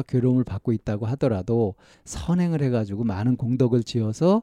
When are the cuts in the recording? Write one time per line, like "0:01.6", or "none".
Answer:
0:01.9